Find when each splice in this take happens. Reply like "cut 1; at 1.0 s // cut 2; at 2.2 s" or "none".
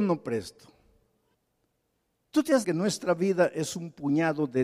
cut 1; at 1.3 s // cut 2; at 2.6 s

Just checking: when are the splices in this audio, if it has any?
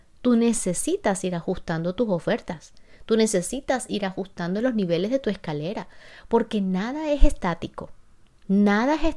none

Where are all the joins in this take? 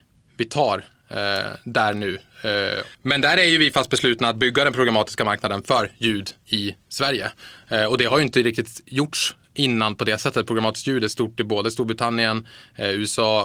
cut 1; at 2.9 s // cut 2; at 6.4 s

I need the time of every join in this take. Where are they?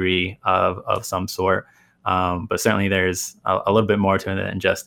none

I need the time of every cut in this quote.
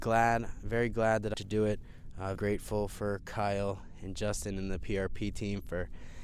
cut 1; at 1.3 s // cut 2; at 2.4 s

